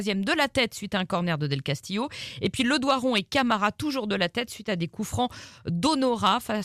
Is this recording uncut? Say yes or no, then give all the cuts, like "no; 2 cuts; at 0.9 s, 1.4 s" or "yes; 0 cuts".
yes; 0 cuts